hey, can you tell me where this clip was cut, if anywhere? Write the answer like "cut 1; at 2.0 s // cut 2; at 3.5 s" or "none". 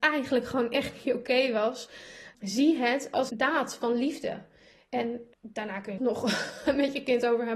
cut 1; at 2.3 s // cut 2; at 3.3 s // cut 3; at 5.3 s // cut 4; at 6.0 s